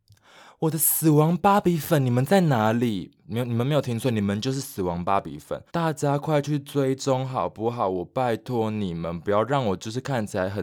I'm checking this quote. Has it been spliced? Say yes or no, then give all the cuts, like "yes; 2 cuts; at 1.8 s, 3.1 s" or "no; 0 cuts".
yes; 2 cuts; at 3.2 s, 5.7 s